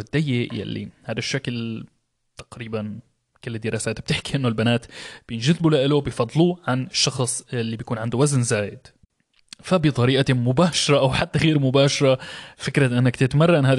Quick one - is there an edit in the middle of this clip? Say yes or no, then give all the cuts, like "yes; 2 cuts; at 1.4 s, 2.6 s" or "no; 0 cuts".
no; 0 cuts